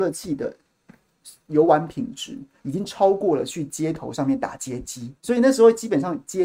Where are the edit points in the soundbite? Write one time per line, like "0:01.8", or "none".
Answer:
0:05.2